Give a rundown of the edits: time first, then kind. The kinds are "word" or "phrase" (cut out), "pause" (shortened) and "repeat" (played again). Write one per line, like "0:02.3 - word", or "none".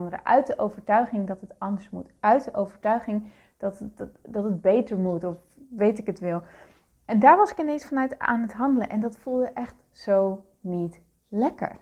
none